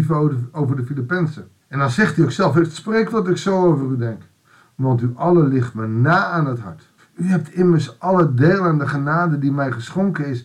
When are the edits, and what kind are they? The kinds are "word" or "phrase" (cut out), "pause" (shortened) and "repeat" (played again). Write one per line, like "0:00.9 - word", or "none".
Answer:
0:01.6 - pause
0:03.1 - word
0:04.4 - pause
0:07.0 - pause